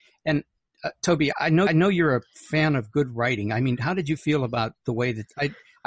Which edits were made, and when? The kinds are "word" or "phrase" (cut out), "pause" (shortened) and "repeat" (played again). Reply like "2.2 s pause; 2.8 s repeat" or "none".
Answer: 1.3 s word; 1.7 s repeat